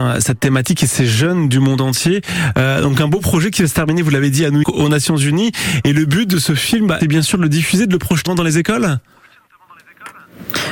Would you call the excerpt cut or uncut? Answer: cut